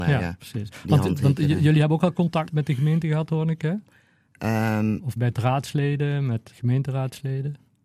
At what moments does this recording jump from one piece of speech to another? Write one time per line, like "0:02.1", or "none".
0:02.5
0:05.2
0:06.5